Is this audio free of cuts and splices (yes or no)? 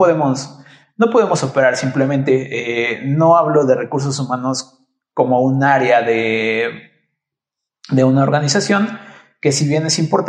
yes